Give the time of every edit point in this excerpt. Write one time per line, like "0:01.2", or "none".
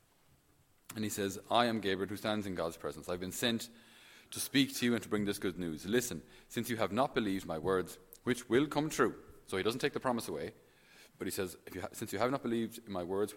0:11.1